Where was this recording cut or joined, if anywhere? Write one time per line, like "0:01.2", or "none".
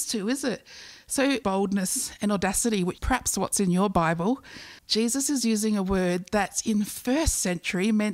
0:01.4
0:03.0
0:04.8